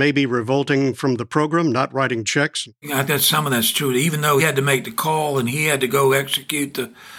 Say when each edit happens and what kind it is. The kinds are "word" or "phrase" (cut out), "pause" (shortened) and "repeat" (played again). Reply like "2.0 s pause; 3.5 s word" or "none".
2.2 s word; 3.1 s word; 4.4 s word